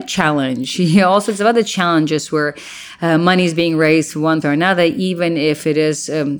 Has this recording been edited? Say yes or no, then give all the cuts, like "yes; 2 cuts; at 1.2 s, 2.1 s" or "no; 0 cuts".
yes; 1 cut; at 4.4 s